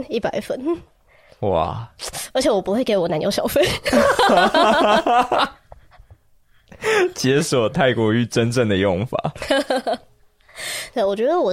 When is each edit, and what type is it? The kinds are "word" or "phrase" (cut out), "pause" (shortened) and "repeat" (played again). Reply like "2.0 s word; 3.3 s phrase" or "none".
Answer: none

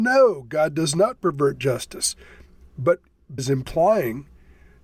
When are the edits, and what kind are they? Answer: 3.4 s word

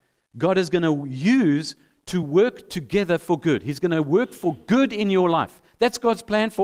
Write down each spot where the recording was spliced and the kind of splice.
none

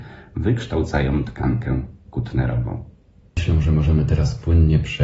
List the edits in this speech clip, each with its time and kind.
none

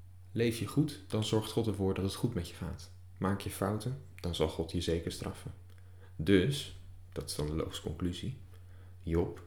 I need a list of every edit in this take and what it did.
none

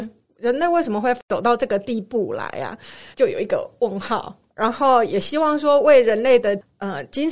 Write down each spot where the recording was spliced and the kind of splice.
3.1 s pause

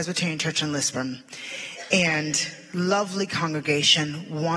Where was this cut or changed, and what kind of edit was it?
none

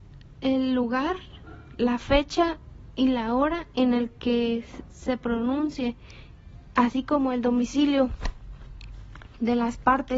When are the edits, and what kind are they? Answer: none

